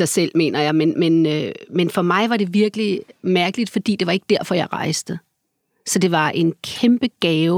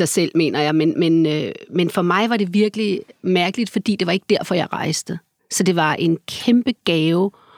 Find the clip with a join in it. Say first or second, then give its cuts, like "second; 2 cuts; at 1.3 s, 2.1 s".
second; 1 cut; at 5.4 s